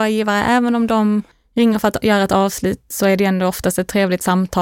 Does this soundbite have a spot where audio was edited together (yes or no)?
yes